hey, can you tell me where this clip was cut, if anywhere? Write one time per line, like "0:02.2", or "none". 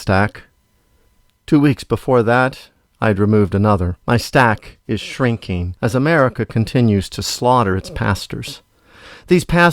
0:04.0